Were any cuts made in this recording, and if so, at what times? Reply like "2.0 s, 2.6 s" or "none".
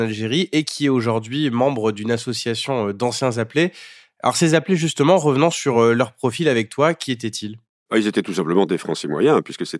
none